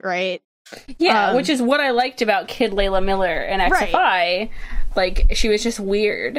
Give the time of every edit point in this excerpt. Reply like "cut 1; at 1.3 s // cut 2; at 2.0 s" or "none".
none